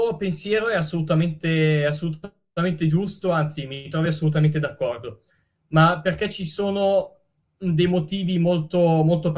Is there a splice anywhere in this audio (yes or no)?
no